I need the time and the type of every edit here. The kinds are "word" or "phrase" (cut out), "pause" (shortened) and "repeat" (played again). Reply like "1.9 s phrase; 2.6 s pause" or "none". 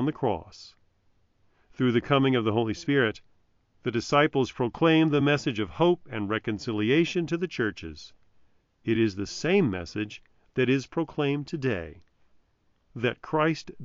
none